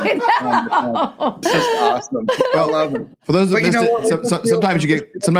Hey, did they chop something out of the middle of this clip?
yes; 2 cuts; at 1.4 s, 3.1 s

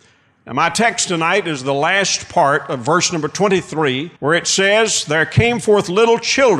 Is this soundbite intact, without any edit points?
no; 1 cut; at 4.2 s

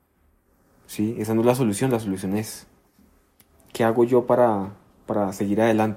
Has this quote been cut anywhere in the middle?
no; 0 cuts

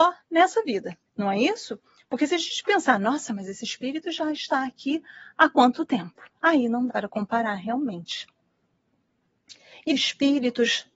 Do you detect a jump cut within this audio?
yes; 3 cuts; at 1.1 s, 6.9 s, 9.9 s

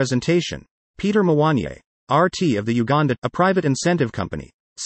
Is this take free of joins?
no; 1 cut; at 3.2 s

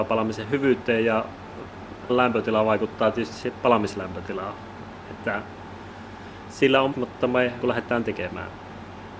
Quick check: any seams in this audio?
yes; 4 cuts; at 2.1 s, 6.9 s, 7.6 s, 8.0 s

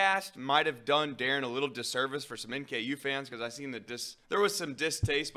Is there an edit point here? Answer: yes; 1 cut; at 4.2 s

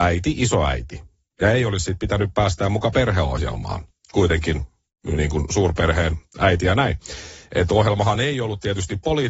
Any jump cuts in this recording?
no; 0 cuts

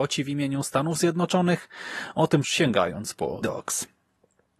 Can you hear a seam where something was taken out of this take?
yes; 2 cuts; at 2.4 s, 3.4 s

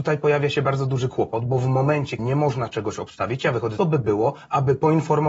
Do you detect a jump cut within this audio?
yes; 2 cuts; at 2.2 s, 3.8 s

